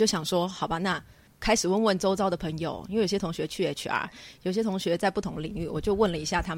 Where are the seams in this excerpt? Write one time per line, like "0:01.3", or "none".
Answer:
0:01.3